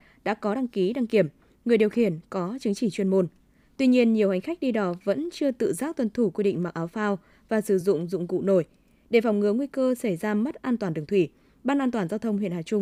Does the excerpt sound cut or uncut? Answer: uncut